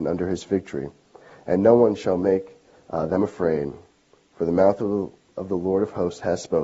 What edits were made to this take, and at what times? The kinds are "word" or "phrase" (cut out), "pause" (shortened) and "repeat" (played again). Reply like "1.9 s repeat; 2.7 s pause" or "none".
none